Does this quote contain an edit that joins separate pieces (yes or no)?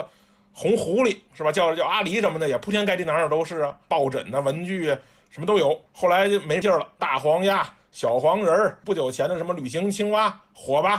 yes